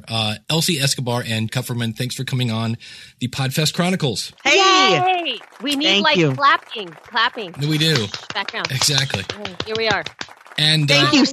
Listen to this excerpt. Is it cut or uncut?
cut